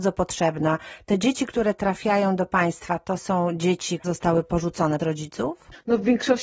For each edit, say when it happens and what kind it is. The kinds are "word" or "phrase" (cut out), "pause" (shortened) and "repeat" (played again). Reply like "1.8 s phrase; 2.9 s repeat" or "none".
4.0 s word; 5.0 s word